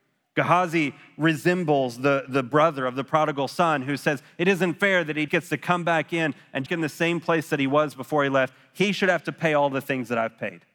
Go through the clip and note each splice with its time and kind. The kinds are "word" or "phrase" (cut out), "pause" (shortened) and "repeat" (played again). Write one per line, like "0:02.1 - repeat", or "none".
0:05.3 - word
0:06.7 - phrase